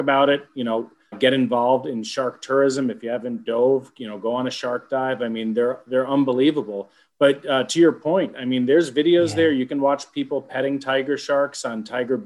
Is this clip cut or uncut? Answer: cut